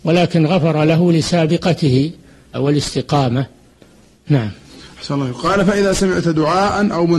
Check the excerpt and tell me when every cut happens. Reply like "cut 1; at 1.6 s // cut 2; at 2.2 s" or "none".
cut 1; at 2.5 s